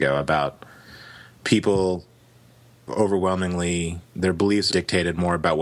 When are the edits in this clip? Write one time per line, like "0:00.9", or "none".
0:02.9
0:04.0
0:04.7